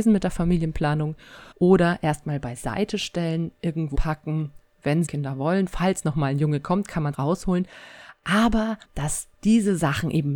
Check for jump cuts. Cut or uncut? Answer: cut